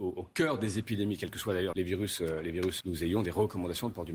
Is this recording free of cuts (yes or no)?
no